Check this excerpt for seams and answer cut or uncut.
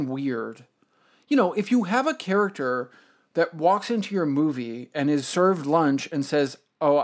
uncut